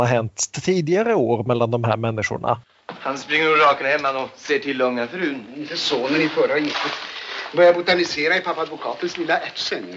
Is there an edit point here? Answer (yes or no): yes